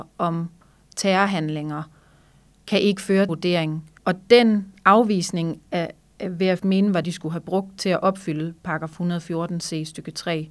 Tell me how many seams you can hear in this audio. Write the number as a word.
four